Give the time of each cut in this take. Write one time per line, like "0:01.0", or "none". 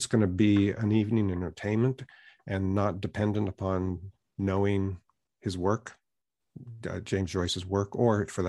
none